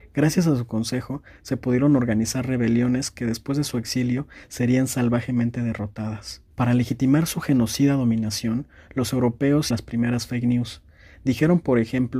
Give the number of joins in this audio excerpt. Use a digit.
2